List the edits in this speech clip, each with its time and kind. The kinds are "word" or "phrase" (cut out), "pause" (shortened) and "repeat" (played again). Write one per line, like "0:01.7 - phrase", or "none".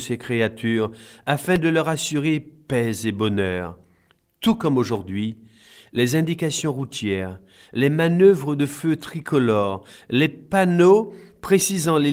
none